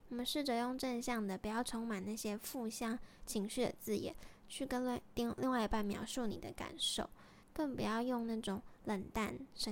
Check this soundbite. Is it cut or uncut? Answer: cut